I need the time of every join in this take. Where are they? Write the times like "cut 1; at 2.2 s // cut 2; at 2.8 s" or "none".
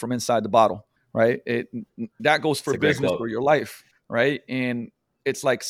cut 1; at 2.2 s